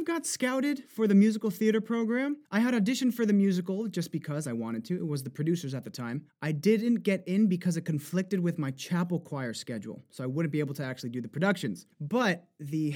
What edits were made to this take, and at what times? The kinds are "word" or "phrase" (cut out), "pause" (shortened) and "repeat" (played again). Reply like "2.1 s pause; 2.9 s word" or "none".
2.4 s pause; 6.3 s pause; 11.9 s pause